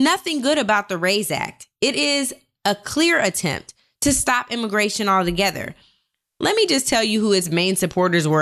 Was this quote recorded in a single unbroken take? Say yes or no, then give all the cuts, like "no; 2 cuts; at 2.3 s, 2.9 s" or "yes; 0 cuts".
yes; 0 cuts